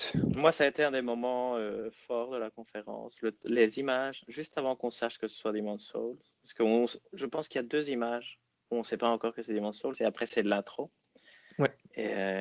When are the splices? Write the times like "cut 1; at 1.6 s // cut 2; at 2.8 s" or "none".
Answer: none

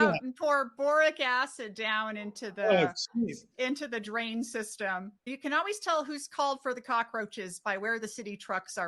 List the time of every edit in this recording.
cut 1; at 5.2 s

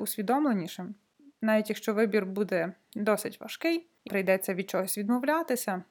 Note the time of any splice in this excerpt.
cut 1; at 4.1 s

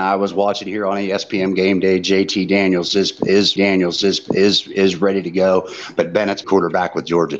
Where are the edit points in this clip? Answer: cut 1; at 3.6 s // cut 2; at 6.4 s

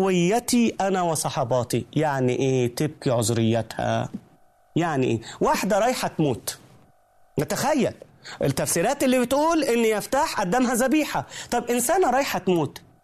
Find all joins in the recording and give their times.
none

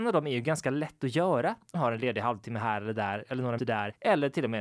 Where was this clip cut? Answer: cut 1; at 1.7 s // cut 2; at 3.6 s

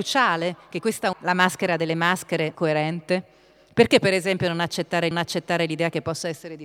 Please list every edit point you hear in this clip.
cut 1; at 1.1 s // cut 2; at 2.5 s // cut 3; at 5.1 s

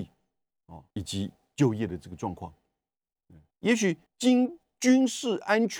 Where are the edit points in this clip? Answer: cut 1; at 0.9 s // cut 2; at 3.5 s // cut 3; at 4.1 s

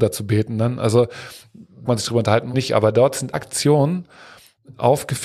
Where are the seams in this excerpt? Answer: cut 1; at 1.9 s // cut 2; at 2.5 s // cut 3; at 3.3 s

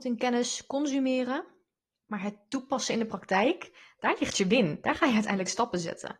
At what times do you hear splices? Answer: none

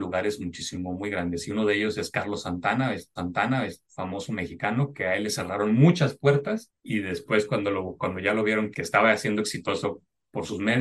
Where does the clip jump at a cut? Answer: cut 1; at 3.2 s // cut 2; at 8.7 s

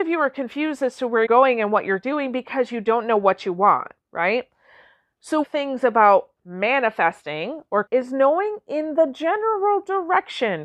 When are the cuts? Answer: cut 1; at 1.3 s // cut 2; at 4.0 s // cut 3; at 5.4 s // cut 4; at 7.9 s

